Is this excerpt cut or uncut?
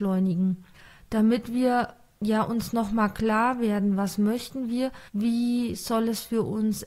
cut